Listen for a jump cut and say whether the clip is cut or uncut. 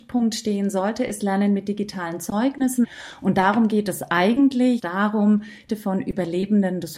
cut